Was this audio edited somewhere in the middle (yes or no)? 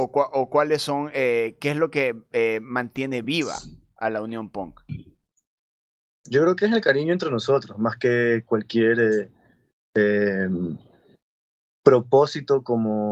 no